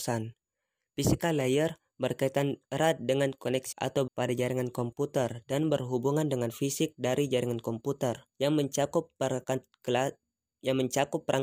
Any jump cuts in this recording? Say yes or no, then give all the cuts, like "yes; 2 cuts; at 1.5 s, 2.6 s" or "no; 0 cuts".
yes; 3 cuts; at 3.7 s, 4.1 s, 8.3 s